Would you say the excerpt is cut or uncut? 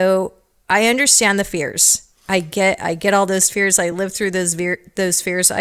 uncut